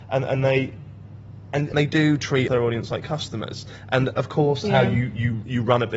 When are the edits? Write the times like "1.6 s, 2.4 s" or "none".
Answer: 1.7 s, 2.5 s, 4.6 s